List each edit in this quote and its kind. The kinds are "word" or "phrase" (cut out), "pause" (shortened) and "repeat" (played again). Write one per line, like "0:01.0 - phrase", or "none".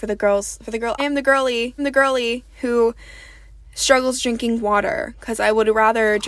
0:01.0 - word
0:01.8 - repeat